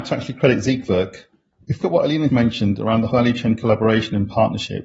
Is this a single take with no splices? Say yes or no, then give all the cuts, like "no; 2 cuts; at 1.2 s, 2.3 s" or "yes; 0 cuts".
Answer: no; 3 cuts; at 1.8 s, 2.3 s, 3.1 s